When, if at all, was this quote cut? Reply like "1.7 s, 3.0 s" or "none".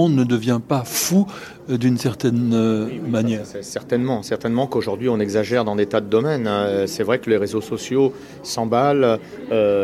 none